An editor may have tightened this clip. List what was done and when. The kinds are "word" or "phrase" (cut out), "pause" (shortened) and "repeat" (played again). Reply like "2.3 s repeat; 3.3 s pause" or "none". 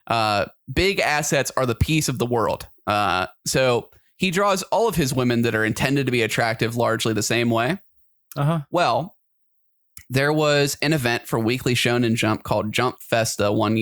none